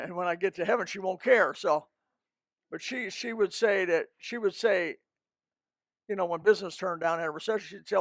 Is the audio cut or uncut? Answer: uncut